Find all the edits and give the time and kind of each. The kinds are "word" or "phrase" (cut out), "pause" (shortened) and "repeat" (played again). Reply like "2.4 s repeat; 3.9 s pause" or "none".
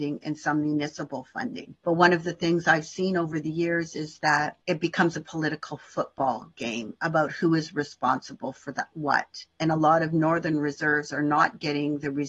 1.8 s pause; 4.6 s pause